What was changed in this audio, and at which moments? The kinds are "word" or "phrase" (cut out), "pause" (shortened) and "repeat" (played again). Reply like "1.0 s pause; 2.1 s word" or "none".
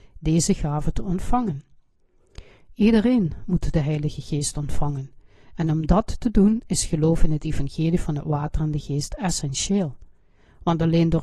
none